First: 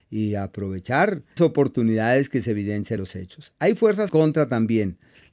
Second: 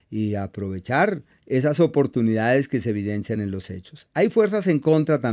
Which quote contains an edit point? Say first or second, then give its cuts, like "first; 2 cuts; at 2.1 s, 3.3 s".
first; 3 cuts; at 1.4 s, 3.0 s, 4.1 s